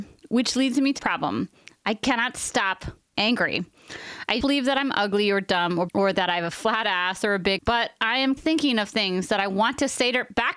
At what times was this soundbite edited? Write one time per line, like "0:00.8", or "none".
0:01.0
0:03.1
0:04.4
0:05.9
0:07.6
0:08.4